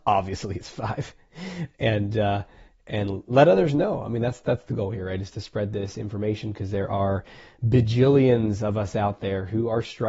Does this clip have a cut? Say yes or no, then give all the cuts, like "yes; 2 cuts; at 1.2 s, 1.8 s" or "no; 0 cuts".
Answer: no; 0 cuts